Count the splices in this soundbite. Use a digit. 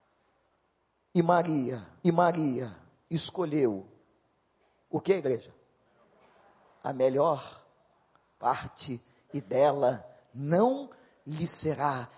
1